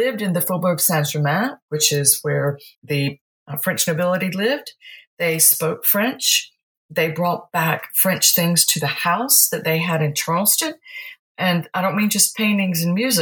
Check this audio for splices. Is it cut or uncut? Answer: cut